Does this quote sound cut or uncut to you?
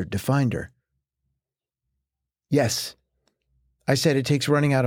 uncut